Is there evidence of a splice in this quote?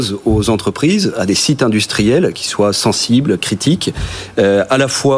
no; 0 cuts

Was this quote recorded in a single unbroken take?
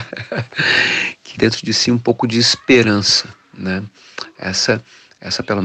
no; 1 cut; at 1.4 s

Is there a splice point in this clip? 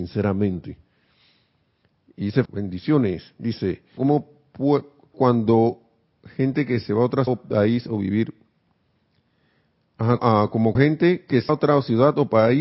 yes; 7 cuts; at 2.5 s, 4.0 s, 5.1 s, 7.3 s, 10.2 s, 10.7 s, 11.5 s

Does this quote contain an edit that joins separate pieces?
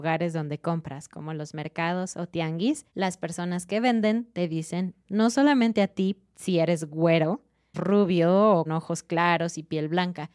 yes; 4 cuts; at 2.9 s, 5.0 s, 7.7 s, 8.7 s

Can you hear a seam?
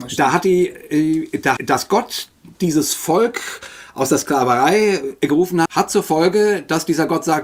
yes; 3 cuts; at 1.6 s, 2.5 s, 5.7 s

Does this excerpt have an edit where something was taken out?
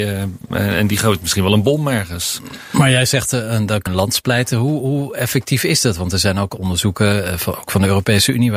yes; 1 cut; at 3.9 s

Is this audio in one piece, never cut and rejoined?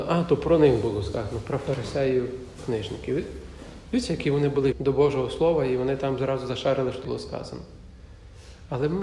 no; 3 cuts; at 2.6 s, 4.7 s, 7.0 s

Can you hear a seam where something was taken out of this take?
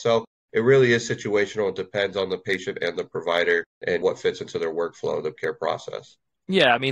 yes; 1 cut; at 5.4 s

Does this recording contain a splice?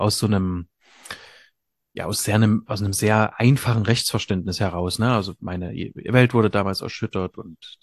no; 0 cuts

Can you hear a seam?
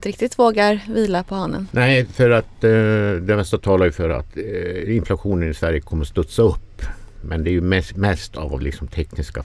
no; 0 cuts

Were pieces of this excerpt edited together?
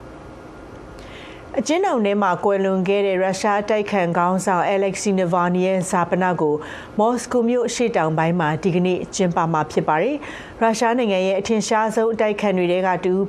no; 0 cuts

